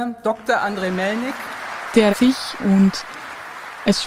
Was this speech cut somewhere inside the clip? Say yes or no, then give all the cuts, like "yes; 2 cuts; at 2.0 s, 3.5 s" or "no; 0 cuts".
yes; 1 cut; at 2.1 s